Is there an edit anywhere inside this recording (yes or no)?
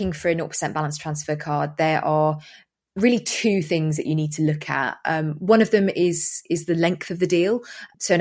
no